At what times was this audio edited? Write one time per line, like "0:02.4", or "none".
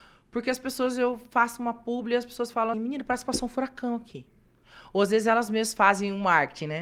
0:02.7